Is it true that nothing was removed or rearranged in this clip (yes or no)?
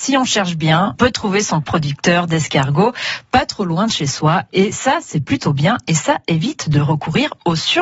no